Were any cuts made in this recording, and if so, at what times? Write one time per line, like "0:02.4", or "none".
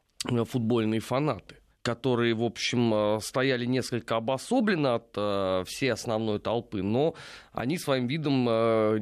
0:01.7

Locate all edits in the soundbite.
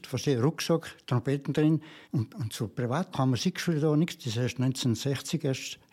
0:02.0
0:03.1

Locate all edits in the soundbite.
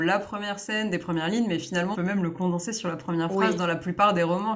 0:01.9

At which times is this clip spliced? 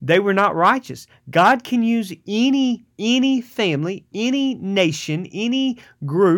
0:02.9

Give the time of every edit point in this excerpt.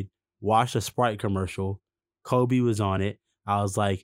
none

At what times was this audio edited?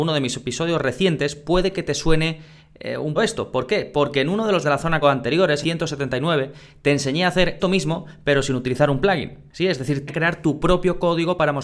0:03.2
0:04.6
0:05.0
0:05.6
0:07.6
0:10.1

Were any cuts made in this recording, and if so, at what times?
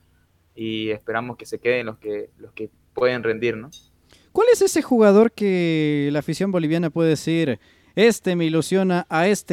none

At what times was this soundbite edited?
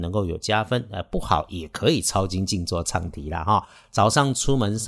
none

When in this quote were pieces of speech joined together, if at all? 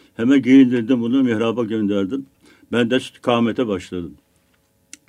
none

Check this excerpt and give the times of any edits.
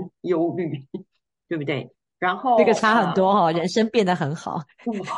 none

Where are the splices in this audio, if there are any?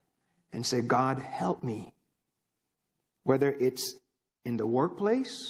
none

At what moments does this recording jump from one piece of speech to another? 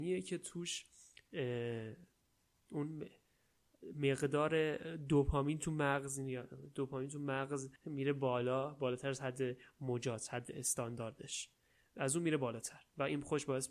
0:07.8

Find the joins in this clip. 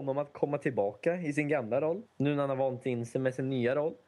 0:02.1

